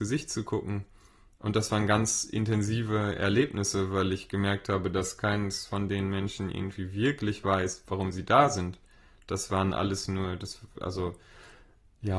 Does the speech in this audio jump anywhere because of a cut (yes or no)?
no